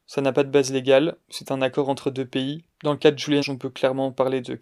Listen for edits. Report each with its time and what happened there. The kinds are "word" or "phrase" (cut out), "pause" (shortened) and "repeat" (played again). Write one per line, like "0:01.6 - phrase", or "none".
0:02.7 - pause
0:03.4 - word

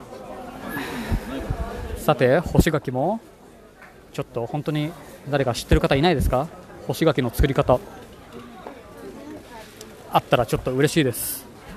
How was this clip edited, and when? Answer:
none

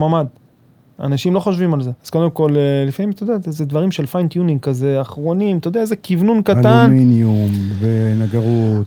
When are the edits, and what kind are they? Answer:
0:02.0 - pause

